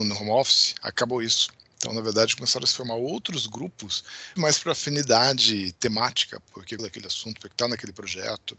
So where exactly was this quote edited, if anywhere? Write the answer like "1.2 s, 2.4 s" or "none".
4.4 s, 6.8 s